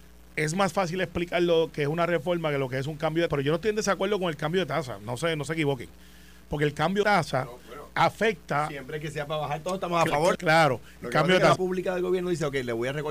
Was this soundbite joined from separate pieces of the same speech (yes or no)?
yes